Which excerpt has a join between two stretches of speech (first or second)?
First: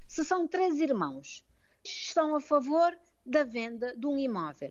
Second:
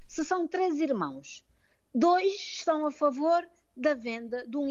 first